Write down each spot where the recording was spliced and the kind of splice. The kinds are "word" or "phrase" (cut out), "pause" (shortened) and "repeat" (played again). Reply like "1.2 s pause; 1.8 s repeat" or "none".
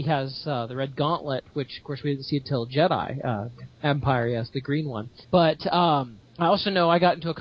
3.7 s pause; 5.2 s pause